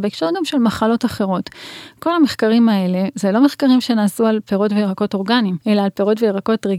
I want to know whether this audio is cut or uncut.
cut